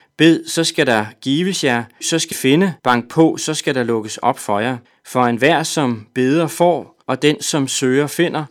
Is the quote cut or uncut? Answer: cut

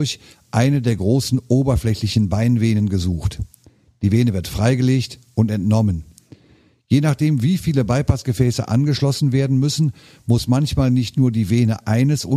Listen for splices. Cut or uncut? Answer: uncut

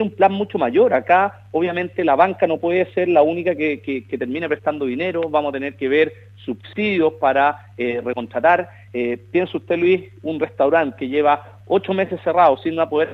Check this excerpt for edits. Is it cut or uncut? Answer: uncut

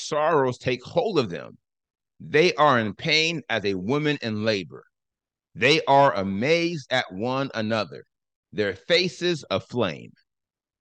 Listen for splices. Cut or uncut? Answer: uncut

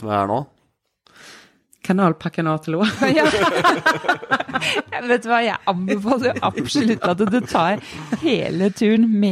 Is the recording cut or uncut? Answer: uncut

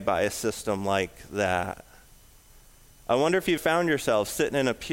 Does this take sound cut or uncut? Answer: cut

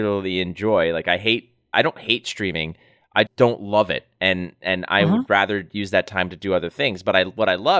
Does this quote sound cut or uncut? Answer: cut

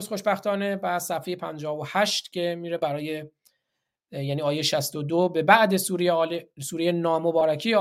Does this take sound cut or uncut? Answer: uncut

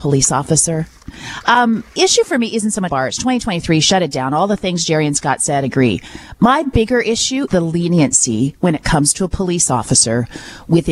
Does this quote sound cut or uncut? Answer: cut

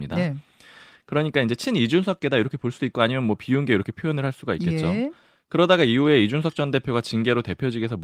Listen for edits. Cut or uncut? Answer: uncut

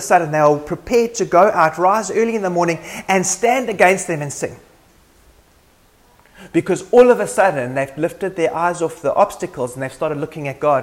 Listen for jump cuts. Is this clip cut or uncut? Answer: uncut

